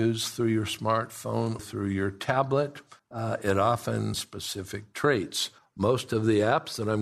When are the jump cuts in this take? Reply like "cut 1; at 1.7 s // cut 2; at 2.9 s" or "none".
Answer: cut 1; at 1.6 s // cut 2; at 3.0 s // cut 3; at 4.1 s // cut 4; at 5.6 s